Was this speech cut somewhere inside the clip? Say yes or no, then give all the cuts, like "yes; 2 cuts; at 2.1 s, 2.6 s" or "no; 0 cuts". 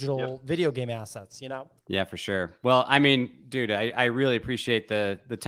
yes; 1 cut; at 1.8 s